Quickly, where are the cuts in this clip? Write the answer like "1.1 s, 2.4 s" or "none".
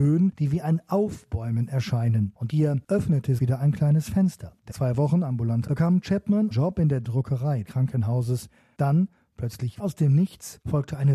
2.5 s, 3.4 s, 4.7 s, 5.7 s, 6.5 s, 7.6 s, 9.8 s